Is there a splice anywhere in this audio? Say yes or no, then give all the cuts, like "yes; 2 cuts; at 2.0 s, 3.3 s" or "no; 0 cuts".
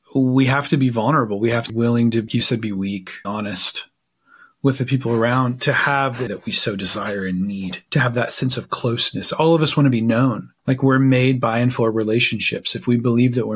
yes; 6 cuts; at 1.7 s, 2.3 s, 3.2 s, 6.3 s, 7.9 s, 10.6 s